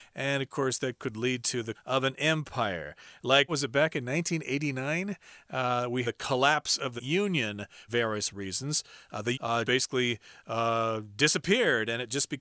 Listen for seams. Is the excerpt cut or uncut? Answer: cut